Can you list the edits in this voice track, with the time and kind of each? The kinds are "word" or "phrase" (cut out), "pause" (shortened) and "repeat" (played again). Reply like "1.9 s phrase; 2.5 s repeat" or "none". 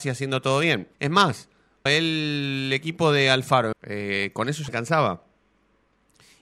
0.9 s pause; 1.9 s word; 3.7 s phrase; 4.7 s word